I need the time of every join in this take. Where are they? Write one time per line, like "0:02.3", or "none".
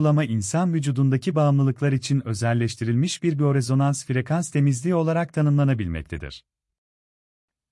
none